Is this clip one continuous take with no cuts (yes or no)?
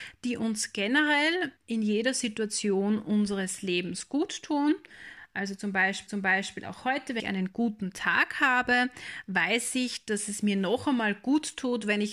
no